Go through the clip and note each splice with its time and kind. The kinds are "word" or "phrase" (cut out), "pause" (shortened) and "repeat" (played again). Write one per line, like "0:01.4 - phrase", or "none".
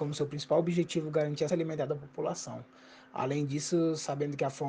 0:01.5 - word